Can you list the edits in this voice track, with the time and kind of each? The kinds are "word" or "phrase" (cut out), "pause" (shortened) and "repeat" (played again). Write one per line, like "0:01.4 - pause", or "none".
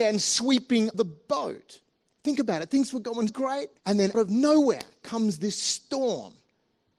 0:00.9 - word
0:01.9 - pause
0:03.3 - word
0:03.8 - pause
0:04.1 - word